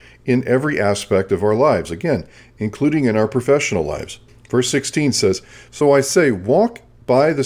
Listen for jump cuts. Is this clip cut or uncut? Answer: uncut